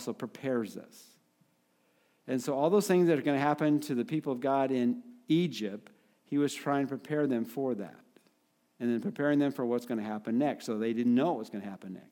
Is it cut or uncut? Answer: uncut